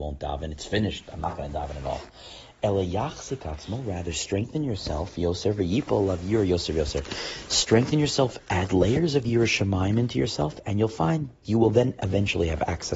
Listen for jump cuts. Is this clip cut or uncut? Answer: uncut